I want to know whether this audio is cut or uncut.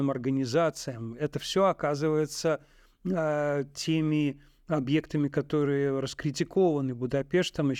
uncut